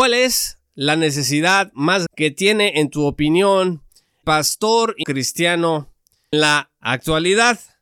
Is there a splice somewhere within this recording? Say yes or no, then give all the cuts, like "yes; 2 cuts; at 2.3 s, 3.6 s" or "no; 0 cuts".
yes; 4 cuts; at 2.1 s, 4.2 s, 5.0 s, 6.3 s